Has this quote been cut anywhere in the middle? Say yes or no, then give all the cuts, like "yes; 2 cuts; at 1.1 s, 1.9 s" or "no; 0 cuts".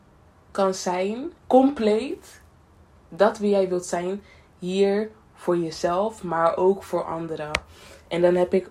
yes; 1 cut; at 1.4 s